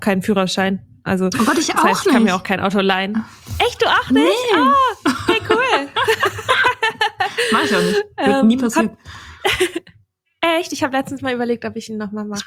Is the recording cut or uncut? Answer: uncut